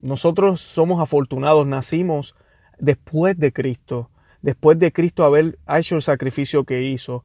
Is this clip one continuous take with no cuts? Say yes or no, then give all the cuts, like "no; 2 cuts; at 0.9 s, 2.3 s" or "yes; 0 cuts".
yes; 0 cuts